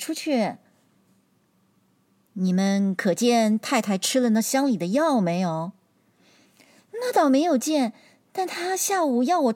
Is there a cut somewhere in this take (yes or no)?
no